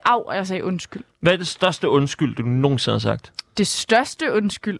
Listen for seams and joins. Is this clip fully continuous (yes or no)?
yes